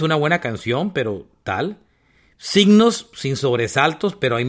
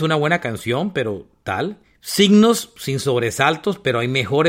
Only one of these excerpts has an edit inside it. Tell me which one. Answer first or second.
second